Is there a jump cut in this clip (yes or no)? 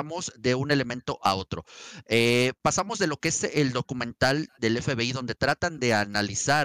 no